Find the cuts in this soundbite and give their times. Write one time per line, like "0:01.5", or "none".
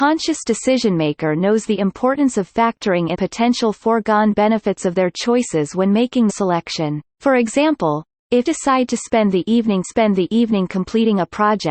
0:03.1
0:06.3
0:07.1
0:08.4
0:09.8